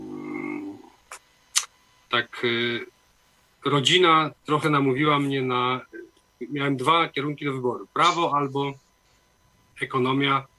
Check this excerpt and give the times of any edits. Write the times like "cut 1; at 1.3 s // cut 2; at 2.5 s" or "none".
cut 1; at 4.4 s